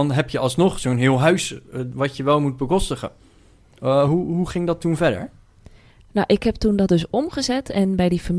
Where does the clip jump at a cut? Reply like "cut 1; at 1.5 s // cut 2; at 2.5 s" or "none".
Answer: none